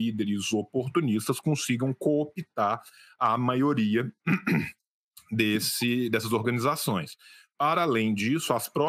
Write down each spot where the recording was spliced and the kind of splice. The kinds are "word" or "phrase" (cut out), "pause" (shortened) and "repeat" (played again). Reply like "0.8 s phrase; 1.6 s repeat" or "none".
none